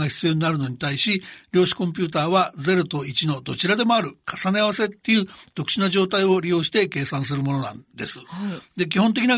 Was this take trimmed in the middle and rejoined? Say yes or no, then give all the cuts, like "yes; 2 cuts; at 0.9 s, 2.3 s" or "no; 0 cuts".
no; 0 cuts